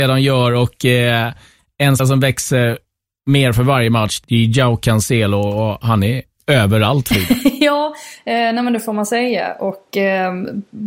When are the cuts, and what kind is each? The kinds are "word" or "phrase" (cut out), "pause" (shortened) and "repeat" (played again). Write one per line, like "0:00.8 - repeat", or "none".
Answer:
0:02.0 - word
0:04.2 - word